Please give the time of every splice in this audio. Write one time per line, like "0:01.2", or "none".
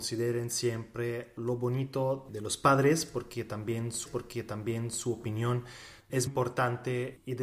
0:04.1
0:06.3